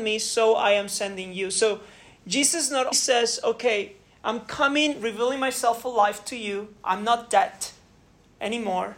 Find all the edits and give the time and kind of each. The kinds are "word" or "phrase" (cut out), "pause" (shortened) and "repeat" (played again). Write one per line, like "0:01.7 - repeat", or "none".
0:02.9 - word